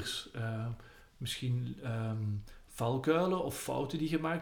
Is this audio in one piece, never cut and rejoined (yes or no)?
yes